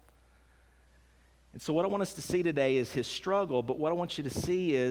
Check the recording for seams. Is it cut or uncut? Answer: uncut